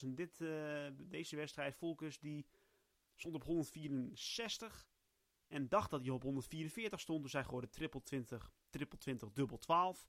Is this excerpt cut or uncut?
uncut